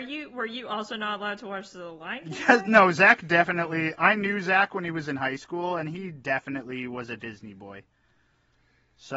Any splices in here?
no; 0 cuts

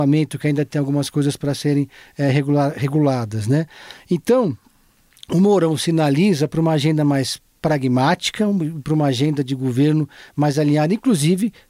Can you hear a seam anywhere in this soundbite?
no; 0 cuts

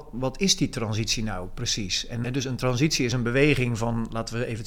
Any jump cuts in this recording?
yes; 1 cut; at 2.2 s

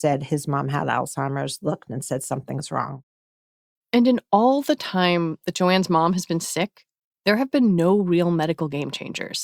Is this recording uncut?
yes; 0 cuts

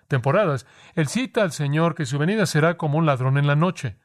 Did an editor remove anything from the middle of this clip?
no; 0 cuts

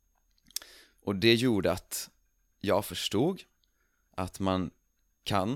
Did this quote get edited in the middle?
no; 0 cuts

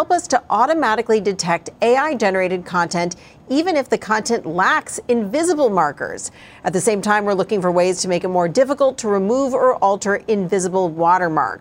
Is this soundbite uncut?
yes; 0 cuts

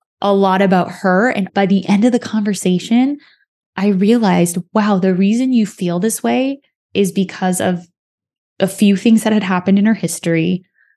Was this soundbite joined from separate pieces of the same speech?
yes; 1 cut; at 1.5 s

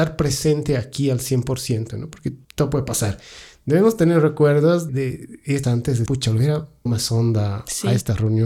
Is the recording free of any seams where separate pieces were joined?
no; 5 cuts; at 2.4 s, 4.9 s, 5.6 s, 6.1 s, 6.9 s

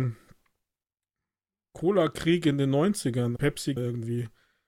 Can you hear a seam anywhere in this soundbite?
yes; 2 cuts; at 3.4 s, 3.8 s

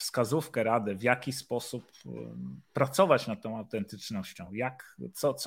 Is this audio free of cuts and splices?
yes; 0 cuts

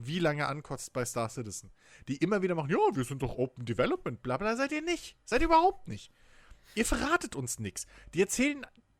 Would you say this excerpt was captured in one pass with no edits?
yes; 0 cuts

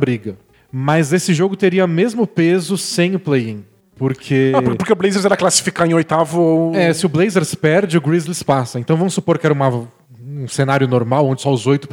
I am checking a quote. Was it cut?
no; 0 cuts

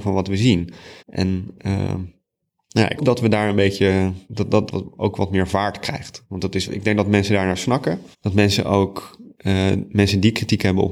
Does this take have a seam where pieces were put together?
yes; 6 cuts; at 1.0 s, 3.0 s, 4.2 s, 4.7 s, 6.7 s, 8.1 s

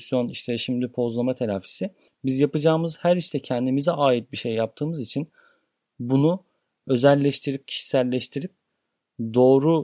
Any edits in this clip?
no; 0 cuts

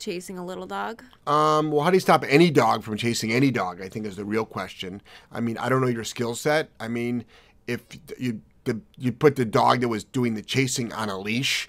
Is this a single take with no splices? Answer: yes; 0 cuts

